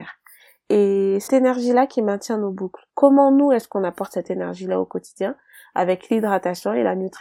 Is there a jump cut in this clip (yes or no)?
yes